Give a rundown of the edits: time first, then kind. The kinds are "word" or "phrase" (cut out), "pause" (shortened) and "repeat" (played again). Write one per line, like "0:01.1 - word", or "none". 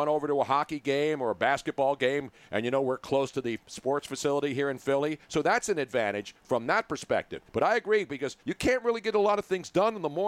0:05.2 - pause
0:07.5 - pause
0:08.4 - pause